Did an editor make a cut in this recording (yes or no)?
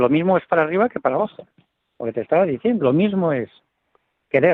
yes